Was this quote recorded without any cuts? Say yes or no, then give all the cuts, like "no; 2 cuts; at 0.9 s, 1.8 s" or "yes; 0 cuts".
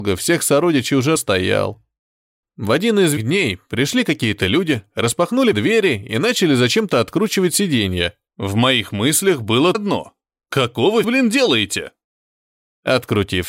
no; 6 cuts; at 1.2 s, 3.2 s, 5.5 s, 8.3 s, 9.7 s, 11.0 s